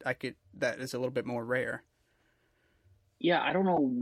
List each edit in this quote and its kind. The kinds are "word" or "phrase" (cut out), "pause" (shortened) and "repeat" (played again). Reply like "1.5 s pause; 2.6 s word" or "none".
none